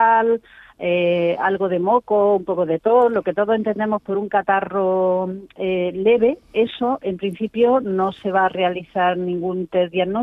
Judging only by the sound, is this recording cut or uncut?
uncut